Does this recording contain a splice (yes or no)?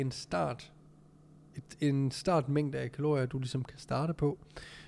no